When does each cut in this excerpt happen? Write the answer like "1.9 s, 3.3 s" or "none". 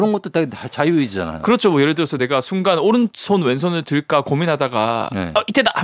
none